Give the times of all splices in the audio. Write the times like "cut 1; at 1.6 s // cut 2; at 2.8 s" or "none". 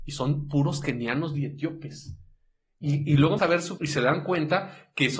cut 1; at 3.4 s // cut 2; at 3.8 s